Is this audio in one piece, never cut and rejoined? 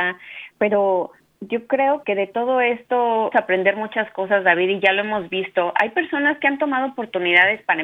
no; 3 cuts; at 1.2 s, 2.0 s, 3.3 s

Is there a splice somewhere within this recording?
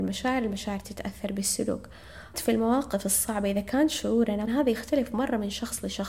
yes; 2 cuts; at 2.3 s, 4.5 s

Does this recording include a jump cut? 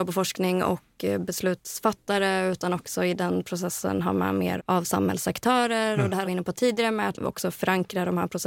yes; 3 cuts; at 4.6 s, 6.2 s, 7.1 s

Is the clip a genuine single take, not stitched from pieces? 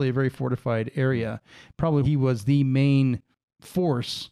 no; 1 cut; at 2.0 s

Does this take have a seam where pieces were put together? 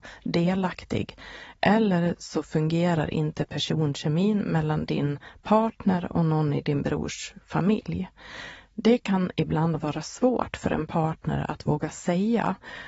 no; 0 cuts

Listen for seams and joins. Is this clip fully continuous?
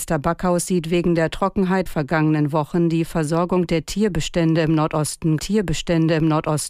no; 2 cuts; at 1.9 s, 5.4 s

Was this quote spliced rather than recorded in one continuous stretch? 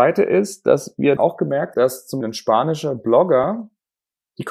yes; 3 cuts; at 1.2 s, 1.7 s, 2.2 s

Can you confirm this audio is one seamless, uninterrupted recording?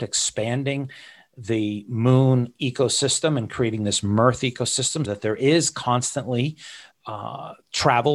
no; 2 cuts; at 5.0 s, 6.9 s

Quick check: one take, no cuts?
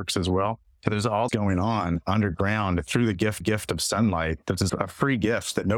no; 3 cuts; at 1.3 s, 3.4 s, 4.7 s

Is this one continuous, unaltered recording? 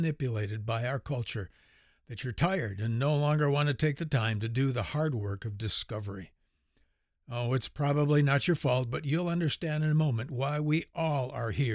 yes; 0 cuts

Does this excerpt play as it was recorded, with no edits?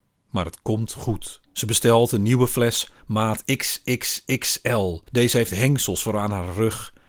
no; 2 cuts; at 1.4 s, 5.1 s

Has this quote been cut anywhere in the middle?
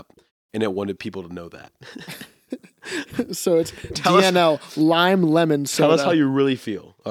no; 0 cuts

